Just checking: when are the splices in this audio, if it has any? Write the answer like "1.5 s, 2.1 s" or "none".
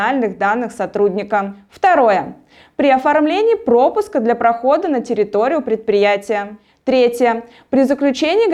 none